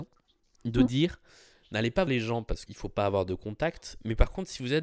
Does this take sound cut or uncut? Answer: cut